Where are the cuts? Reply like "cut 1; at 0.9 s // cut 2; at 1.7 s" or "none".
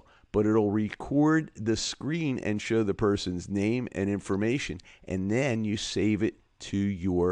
none